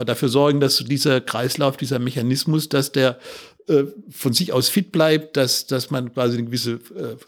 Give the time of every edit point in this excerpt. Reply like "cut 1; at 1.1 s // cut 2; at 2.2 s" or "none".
none